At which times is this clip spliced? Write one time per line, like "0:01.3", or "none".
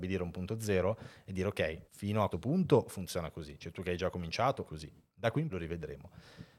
0:01.9
0:02.3
0:04.6
0:05.5